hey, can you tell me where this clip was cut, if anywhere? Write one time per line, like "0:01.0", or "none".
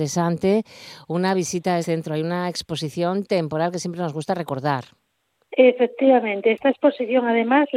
0:01.8